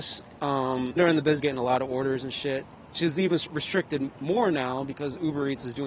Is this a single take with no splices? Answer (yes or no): no